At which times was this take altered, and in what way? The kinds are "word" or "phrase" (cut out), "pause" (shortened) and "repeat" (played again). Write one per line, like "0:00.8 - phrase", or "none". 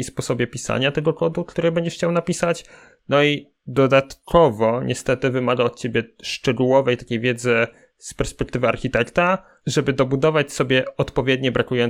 none